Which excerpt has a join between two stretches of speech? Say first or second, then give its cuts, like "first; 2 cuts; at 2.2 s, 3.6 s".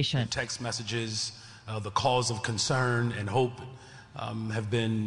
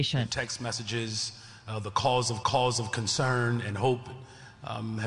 second; 1 cut; at 2.4 s